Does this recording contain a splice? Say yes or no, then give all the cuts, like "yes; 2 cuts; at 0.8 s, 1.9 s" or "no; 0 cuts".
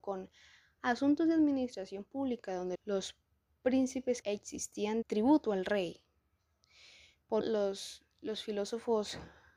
yes; 4 cuts; at 2.8 s, 4.2 s, 5.0 s, 7.4 s